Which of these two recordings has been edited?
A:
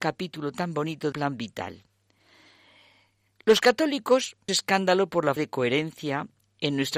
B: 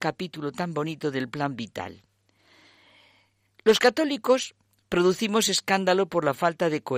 A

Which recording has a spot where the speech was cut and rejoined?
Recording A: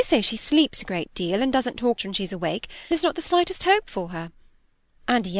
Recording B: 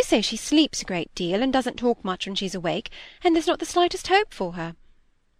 A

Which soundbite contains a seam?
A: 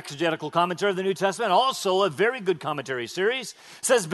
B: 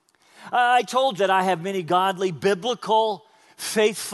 B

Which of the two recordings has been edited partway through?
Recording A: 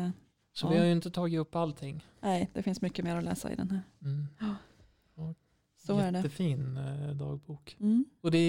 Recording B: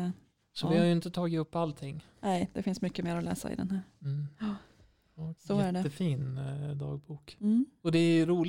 B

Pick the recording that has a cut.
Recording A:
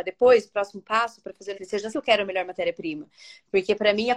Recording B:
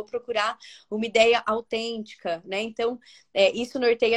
A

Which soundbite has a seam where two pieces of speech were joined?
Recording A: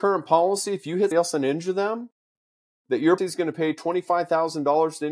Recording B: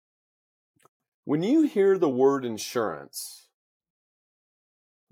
A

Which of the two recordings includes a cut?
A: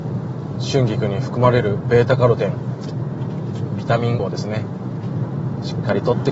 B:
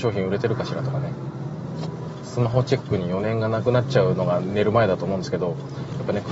A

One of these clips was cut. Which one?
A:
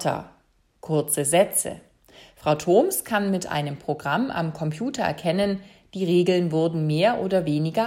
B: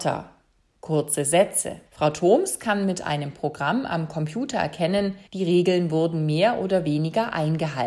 B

